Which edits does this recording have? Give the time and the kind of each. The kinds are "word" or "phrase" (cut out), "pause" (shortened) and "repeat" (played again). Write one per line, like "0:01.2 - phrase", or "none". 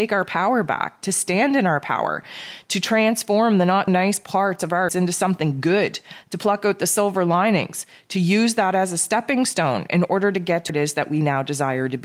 0:03.9 - word
0:04.9 - word
0:10.7 - word